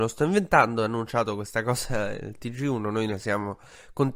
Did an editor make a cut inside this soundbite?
no; 0 cuts

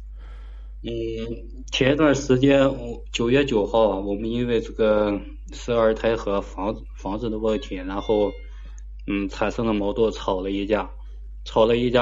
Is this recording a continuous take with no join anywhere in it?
yes; 0 cuts

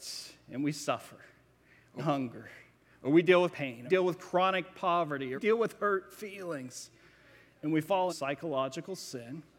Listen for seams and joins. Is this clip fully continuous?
no; 5 cuts; at 2.0 s, 3.5 s, 3.9 s, 5.3 s, 8.1 s

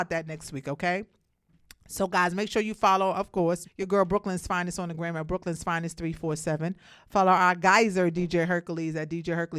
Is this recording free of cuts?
no; 1 cut; at 3.6 s

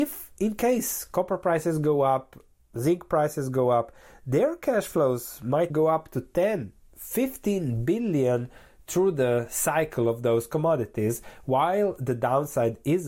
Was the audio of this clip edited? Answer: yes; 1 cut; at 5.7 s

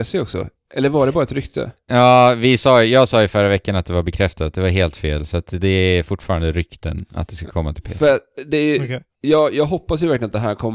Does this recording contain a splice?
no; 0 cuts

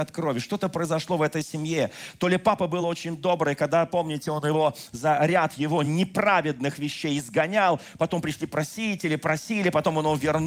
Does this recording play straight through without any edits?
yes; 0 cuts

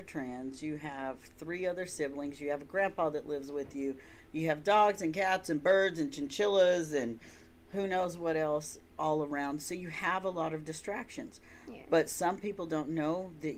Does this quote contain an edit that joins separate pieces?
no; 0 cuts

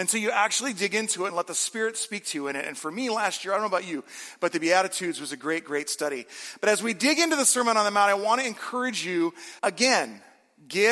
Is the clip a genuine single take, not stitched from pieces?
no; 1 cut; at 9.6 s

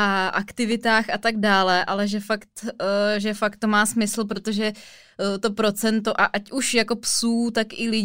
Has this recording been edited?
no; 0 cuts

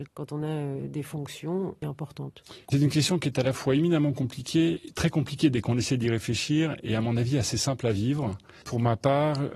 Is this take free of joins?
no; 2 cuts; at 2.7 s, 4.8 s

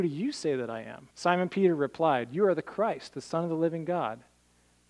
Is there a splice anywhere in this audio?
yes; 1 cut; at 1.1 s

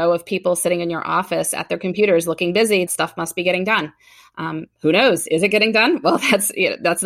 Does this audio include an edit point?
yes; 1 cut; at 2.9 s

